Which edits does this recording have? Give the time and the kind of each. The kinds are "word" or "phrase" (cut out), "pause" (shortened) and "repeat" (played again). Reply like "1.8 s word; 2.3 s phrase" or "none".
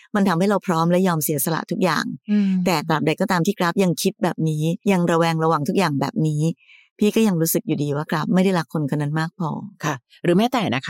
4.8 s pause